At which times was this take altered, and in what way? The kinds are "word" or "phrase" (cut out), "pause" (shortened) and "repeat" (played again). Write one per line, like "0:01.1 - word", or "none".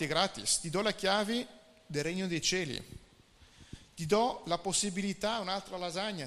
none